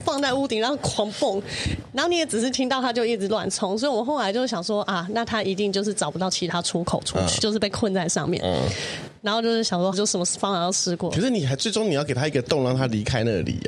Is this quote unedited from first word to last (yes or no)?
no